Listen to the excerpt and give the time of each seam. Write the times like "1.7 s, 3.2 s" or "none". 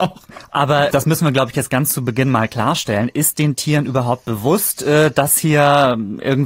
0.9 s